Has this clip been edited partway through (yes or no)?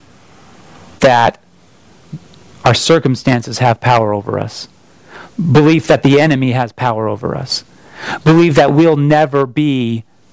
yes